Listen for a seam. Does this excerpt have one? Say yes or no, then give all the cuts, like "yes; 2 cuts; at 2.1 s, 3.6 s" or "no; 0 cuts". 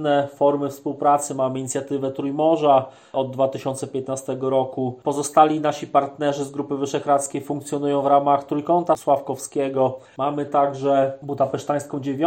no; 0 cuts